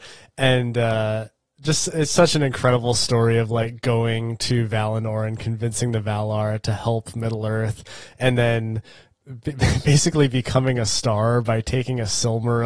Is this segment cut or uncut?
uncut